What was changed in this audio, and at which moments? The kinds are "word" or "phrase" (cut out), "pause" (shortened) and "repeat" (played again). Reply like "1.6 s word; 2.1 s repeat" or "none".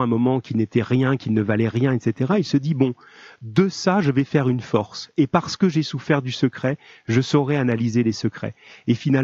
none